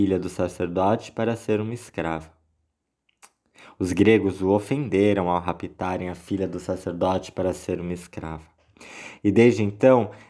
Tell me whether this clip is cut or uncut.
uncut